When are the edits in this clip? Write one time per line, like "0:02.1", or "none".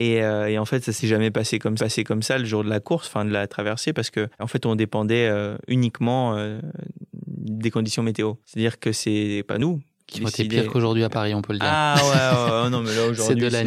0:01.8
0:08.4